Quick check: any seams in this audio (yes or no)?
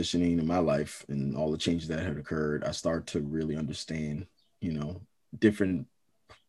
no